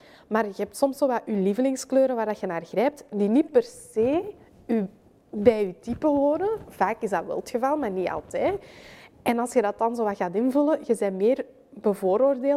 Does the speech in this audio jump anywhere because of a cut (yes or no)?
no